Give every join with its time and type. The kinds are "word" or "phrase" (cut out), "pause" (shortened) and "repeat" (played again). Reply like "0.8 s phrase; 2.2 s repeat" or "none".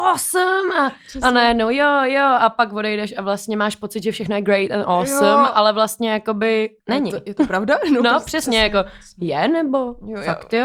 6.8 s pause